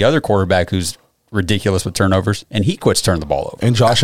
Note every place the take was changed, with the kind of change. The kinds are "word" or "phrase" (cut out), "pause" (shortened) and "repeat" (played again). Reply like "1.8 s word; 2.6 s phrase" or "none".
none